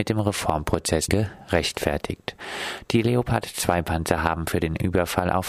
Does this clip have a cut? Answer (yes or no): yes